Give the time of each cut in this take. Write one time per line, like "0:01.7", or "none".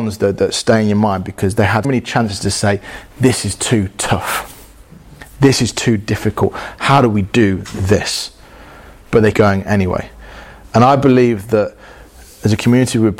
0:01.8
0:09.3